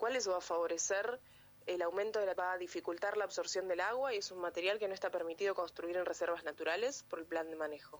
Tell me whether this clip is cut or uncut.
cut